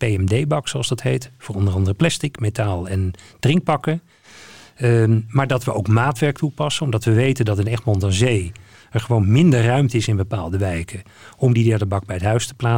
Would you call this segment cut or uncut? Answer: uncut